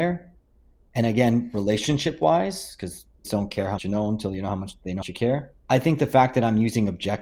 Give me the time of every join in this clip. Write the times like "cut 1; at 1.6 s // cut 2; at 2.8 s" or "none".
cut 1; at 3.2 s // cut 2; at 3.8 s // cut 3; at 5.0 s // cut 4; at 5.6 s

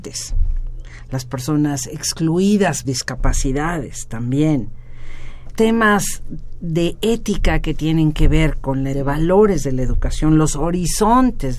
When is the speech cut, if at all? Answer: cut 1; at 2.8 s // cut 2; at 5.5 s // cut 3; at 8.9 s

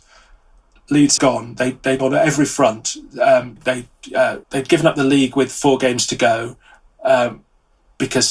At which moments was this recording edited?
cut 1; at 1.2 s // cut 2; at 2.0 s // cut 3; at 3.6 s // cut 4; at 4.4 s

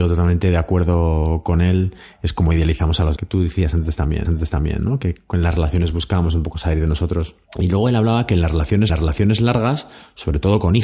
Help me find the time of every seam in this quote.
cut 1; at 3.2 s // cut 2; at 4.2 s // cut 3; at 7.5 s // cut 4; at 8.9 s

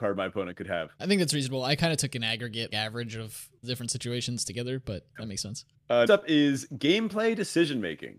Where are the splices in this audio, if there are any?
cut 1; at 1.0 s // cut 2; at 2.7 s // cut 3; at 3.6 s // cut 4; at 5.1 s // cut 5; at 6.1 s

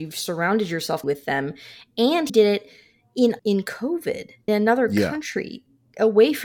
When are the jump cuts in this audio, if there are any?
cut 1; at 1.0 s // cut 2; at 2.3 s // cut 3; at 3.4 s // cut 4; at 4.5 s

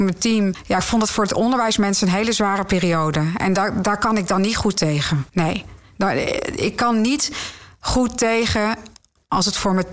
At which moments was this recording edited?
cut 1; at 5.3 s

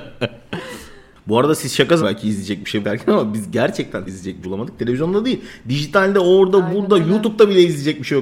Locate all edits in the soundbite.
cut 1; at 2.0 s // cut 2; at 2.8 s // cut 3; at 4.1 s // cut 4; at 4.4 s

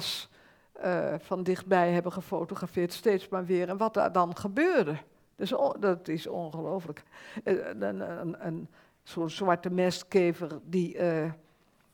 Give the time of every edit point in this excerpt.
none

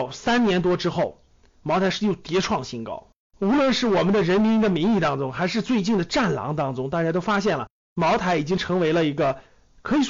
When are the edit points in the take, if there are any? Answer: cut 1; at 3.2 s

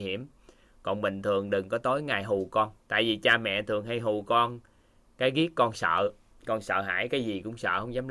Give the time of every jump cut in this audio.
cut 1; at 2.8 s

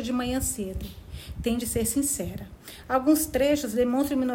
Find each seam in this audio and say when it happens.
none

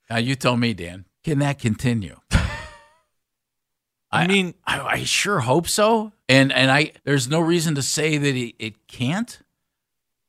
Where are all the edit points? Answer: cut 1; at 1.1 s // cut 2; at 6.2 s // cut 3; at 7.0 s

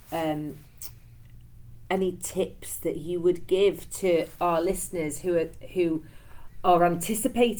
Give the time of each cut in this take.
none

